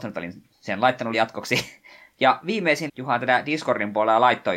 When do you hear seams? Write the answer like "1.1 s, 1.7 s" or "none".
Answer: 1.1 s, 2.9 s